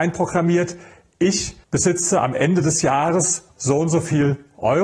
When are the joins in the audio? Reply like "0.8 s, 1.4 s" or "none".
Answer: 1.6 s